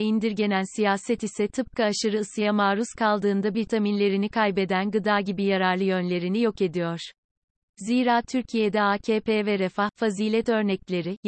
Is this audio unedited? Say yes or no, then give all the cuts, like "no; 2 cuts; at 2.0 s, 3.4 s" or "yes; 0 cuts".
no; 1 cut; at 3.5 s